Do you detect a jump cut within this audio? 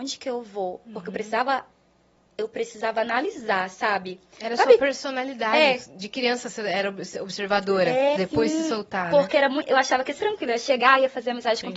yes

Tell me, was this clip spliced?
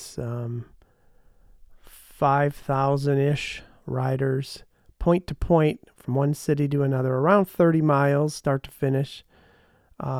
no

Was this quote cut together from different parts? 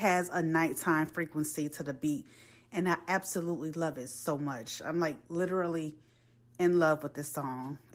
no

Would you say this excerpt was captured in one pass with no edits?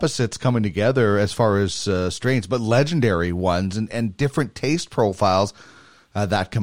yes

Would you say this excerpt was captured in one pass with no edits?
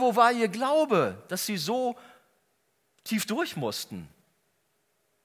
yes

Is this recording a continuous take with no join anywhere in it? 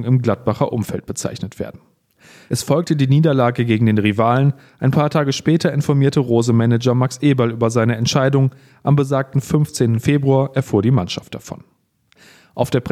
yes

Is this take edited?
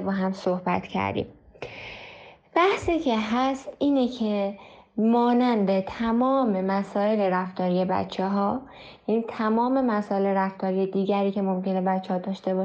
no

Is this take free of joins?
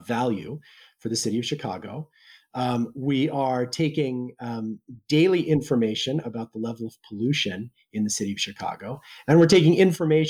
yes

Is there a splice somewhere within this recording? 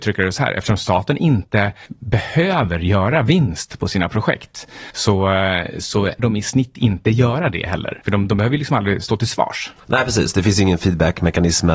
yes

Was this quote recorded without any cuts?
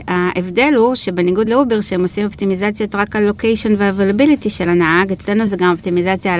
yes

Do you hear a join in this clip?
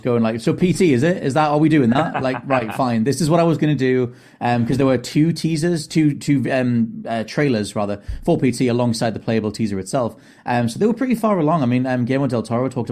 no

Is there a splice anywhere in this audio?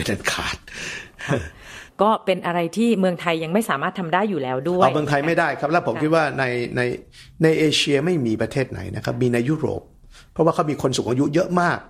no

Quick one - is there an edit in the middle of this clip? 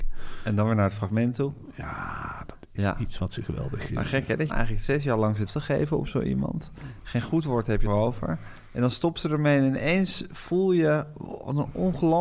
yes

